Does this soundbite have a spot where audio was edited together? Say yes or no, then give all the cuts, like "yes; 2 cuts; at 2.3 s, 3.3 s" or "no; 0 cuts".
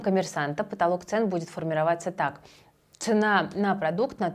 no; 0 cuts